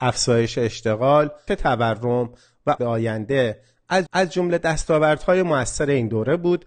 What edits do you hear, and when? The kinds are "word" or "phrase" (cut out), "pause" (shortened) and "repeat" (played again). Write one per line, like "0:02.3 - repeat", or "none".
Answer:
0:01.5 - word
0:02.8 - phrase
0:04.1 - repeat